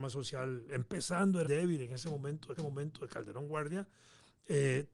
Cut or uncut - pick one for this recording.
cut